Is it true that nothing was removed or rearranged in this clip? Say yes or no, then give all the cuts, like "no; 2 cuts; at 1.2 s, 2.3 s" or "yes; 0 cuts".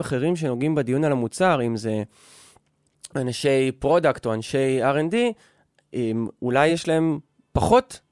yes; 0 cuts